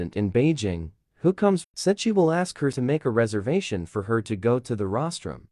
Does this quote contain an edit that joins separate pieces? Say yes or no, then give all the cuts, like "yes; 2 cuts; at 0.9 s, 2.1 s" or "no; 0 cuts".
yes; 2 cuts; at 1.6 s, 2.7 s